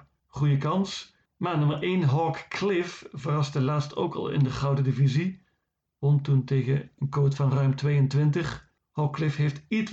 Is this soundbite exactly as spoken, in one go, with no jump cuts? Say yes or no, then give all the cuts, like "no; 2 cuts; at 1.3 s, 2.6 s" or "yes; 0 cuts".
yes; 0 cuts